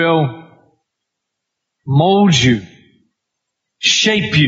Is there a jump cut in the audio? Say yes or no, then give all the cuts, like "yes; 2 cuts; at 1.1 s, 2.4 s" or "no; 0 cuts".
no; 0 cuts